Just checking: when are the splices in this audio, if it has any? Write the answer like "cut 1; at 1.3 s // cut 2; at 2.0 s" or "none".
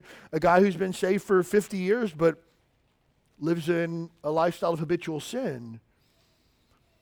none